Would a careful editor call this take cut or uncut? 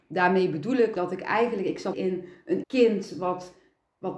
cut